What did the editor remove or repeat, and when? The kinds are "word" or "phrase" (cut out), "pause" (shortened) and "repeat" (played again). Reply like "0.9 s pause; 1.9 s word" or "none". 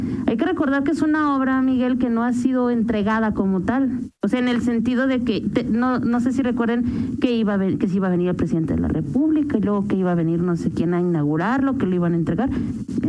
4.2 s pause